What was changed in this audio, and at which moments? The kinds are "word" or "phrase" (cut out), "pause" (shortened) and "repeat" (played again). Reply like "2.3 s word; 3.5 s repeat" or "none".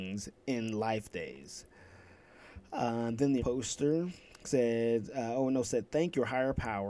1.1 s word; 3.4 s word; 5.6 s word